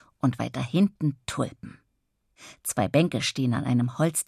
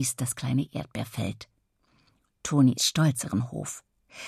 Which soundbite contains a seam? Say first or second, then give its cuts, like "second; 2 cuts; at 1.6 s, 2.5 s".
second; 2 cuts; at 2.8 s, 3.2 s